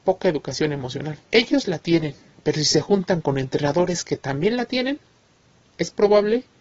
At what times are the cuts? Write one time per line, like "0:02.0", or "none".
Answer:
0:01.2
0:02.3